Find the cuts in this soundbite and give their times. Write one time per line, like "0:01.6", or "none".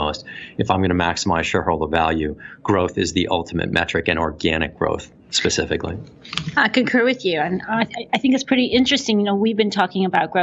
0:05.2